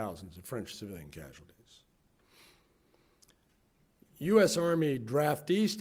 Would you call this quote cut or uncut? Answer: uncut